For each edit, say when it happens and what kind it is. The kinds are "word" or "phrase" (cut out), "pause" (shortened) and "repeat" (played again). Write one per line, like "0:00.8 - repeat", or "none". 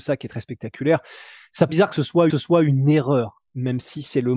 0:01.7 - word
0:02.3 - repeat
0:03.5 - pause